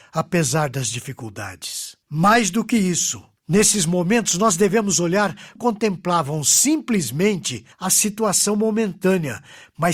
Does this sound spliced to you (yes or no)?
yes